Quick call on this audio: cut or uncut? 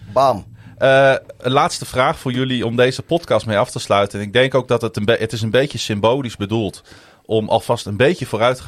uncut